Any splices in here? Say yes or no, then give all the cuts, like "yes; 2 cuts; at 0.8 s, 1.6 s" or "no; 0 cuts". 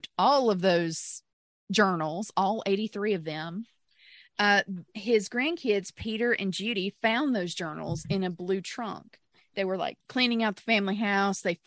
yes; 2 cuts; at 4.9 s, 10.0 s